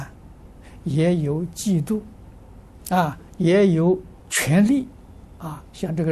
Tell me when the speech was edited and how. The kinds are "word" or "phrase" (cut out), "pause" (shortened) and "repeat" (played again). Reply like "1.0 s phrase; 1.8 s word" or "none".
4.2 s pause

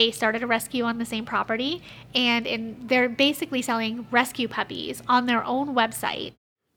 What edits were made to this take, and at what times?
none

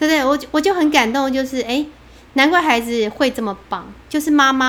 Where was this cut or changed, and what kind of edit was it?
none

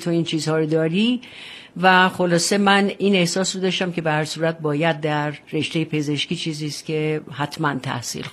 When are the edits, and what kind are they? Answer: 5.4 s pause

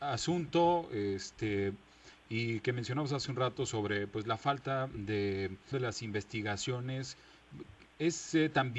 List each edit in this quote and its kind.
5.7 s word

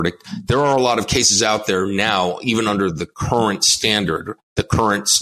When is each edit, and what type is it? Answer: none

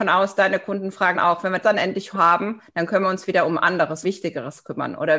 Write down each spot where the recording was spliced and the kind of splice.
1.1 s word; 1.6 s word; 2.1 s word; 4.0 s word

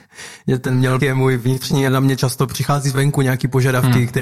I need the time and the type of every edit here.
1.0 s word; 1.9 s word

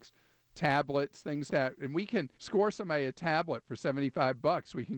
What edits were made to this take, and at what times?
1.5 s word; 2.3 s pause

